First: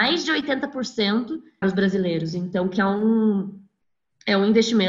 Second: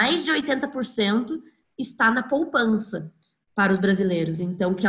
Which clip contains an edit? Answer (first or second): first